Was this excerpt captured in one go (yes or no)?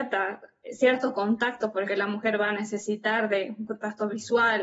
no